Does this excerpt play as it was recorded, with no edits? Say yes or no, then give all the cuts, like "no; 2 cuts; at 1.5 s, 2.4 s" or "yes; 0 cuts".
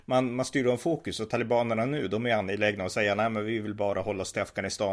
yes; 0 cuts